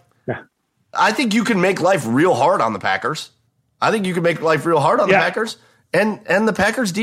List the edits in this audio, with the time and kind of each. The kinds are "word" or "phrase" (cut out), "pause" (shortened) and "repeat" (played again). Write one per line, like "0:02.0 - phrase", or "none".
none